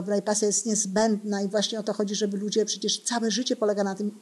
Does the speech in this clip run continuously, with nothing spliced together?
yes; 0 cuts

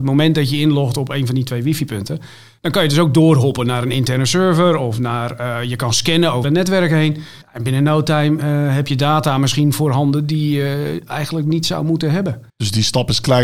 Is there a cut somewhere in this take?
yes; 3 cuts; at 6.4 s, 7.4 s, 12.5 s

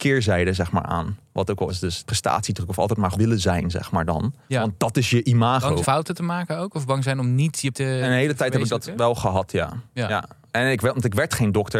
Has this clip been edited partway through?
yes; 6 cuts; at 1.7 s, 2.0 s, 3.1 s, 4.4 s, 5.8 s, 7.7 s

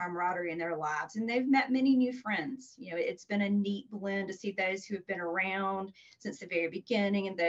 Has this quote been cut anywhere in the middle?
no; 0 cuts

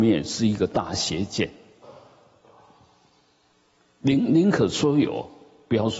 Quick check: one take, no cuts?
yes; 0 cuts

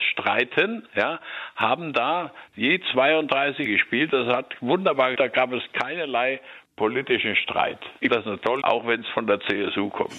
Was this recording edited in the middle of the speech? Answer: yes; 4 cuts; at 3.7 s, 5.2 s, 8.1 s, 8.6 s

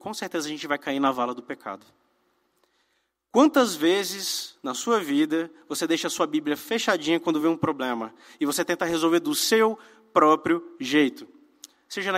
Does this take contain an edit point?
no; 0 cuts

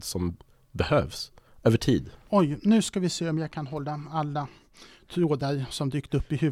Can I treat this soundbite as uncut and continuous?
yes; 0 cuts

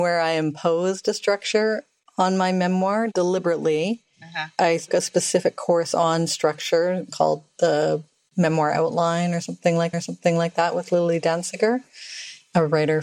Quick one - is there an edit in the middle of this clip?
yes; 2 cuts; at 4.9 s, 9.9 s

